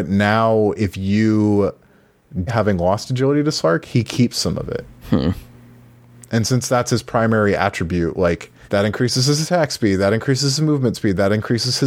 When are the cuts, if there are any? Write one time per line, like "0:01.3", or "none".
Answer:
0:02.5
0:05.0
0:08.6